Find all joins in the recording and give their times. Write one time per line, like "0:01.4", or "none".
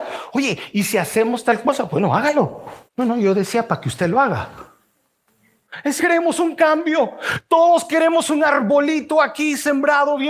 0:02.9
0:06.0